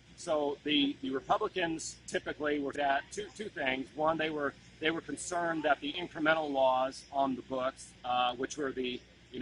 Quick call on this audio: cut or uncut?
cut